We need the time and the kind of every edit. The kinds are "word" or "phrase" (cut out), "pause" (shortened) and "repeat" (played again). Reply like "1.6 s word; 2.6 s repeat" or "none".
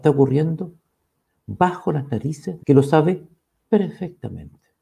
2.6 s phrase